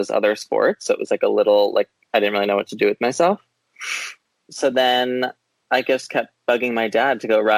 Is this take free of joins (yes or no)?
yes